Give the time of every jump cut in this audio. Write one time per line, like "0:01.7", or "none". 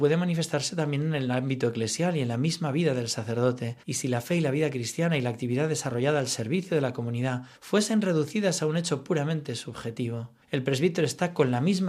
0:03.8
0:07.6
0:10.4